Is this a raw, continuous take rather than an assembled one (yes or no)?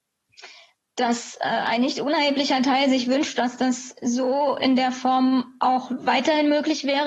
yes